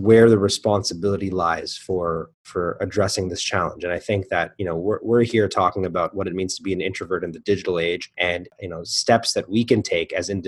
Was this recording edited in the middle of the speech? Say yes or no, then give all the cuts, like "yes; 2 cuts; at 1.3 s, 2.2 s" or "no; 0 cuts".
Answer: yes; 1 cut; at 2.3 s